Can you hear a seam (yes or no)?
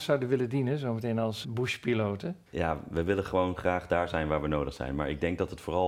yes